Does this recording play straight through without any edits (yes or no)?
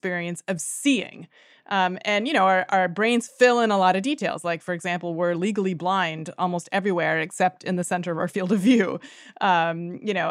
yes